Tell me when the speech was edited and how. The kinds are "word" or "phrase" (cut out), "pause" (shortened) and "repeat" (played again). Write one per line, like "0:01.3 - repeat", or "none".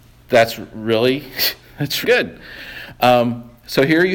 0:02.0 - word